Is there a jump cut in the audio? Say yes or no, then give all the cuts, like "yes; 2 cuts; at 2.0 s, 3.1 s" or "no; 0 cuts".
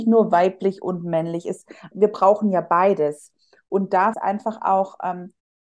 yes; 2 cuts; at 1.9 s, 4.1 s